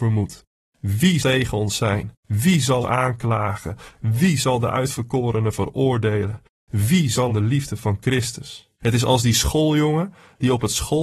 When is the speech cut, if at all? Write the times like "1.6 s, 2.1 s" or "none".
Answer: 1.2 s, 2.2 s, 2.8 s, 7.3 s, 8.7 s